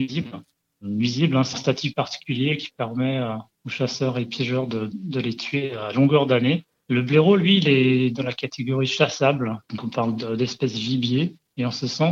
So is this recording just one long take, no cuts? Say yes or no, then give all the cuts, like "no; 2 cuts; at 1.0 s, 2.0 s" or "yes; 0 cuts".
no; 3 cuts; at 1.5 s, 3.5 s, 9.6 s